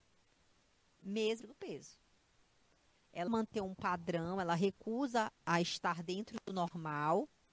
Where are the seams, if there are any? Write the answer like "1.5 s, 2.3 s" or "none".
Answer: 1.4 s, 3.3 s, 5.4 s